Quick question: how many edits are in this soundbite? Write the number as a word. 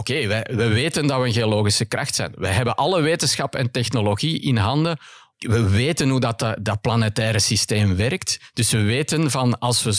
zero